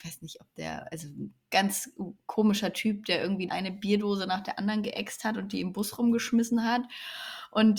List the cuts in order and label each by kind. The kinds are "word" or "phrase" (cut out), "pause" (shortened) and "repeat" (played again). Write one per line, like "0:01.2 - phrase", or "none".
0:03.5 - word